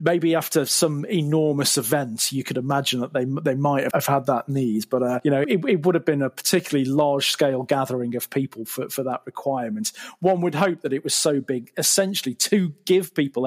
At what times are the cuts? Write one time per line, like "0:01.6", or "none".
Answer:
0:03.9
0:05.4